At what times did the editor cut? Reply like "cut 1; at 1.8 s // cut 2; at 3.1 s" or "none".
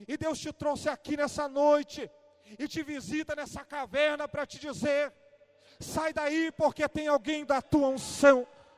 cut 1; at 7.5 s